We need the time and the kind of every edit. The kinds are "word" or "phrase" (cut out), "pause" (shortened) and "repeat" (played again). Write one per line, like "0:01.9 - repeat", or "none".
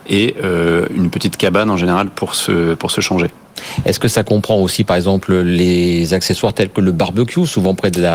none